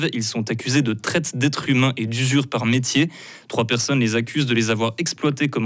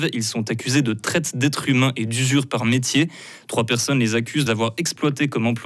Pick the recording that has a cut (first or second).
second